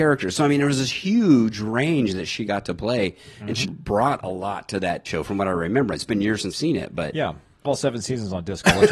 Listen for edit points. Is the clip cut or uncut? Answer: cut